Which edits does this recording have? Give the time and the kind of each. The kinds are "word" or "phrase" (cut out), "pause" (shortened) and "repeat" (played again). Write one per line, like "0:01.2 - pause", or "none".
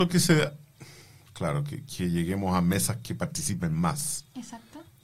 none